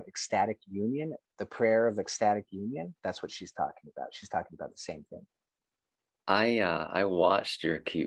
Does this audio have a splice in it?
no; 0 cuts

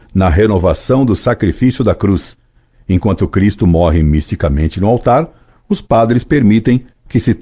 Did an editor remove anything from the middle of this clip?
no; 0 cuts

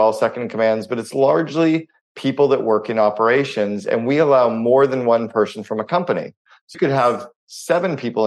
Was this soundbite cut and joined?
yes; 1 cut; at 6.7 s

